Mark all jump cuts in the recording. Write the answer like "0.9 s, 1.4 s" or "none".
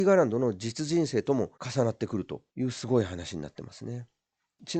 1.5 s